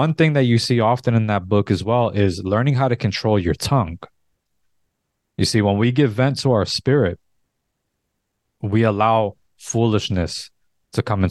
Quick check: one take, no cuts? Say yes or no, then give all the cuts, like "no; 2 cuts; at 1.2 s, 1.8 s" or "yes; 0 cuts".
yes; 0 cuts